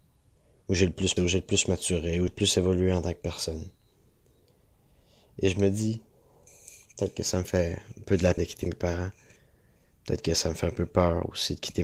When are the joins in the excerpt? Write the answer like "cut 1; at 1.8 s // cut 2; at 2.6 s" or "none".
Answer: cut 1; at 1.2 s // cut 2; at 2.3 s // cut 3; at 8.4 s